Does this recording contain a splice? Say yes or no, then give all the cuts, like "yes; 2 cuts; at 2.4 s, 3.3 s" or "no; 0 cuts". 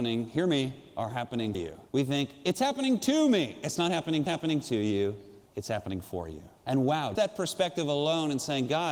yes; 6 cuts; at 1.5 s, 1.9 s, 4.3 s, 5.5 s, 6.6 s, 7.1 s